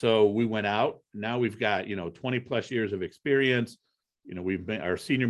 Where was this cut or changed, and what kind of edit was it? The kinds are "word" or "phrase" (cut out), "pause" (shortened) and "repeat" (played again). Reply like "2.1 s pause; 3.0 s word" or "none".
none